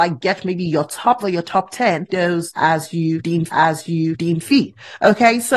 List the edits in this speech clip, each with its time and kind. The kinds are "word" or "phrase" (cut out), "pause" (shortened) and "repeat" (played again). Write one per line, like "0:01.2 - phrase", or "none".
0:01.2 - word
0:02.1 - phrase
0:03.5 - repeat